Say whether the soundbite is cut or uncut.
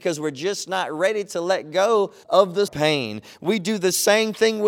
cut